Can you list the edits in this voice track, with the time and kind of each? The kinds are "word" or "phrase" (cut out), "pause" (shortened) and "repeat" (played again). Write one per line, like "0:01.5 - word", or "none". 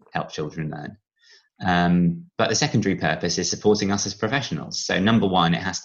none